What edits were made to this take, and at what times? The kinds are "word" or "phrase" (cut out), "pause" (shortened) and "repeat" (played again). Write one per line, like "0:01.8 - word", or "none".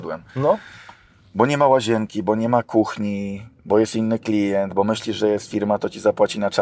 none